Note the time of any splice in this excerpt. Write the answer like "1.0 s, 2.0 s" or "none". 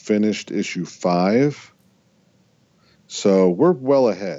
none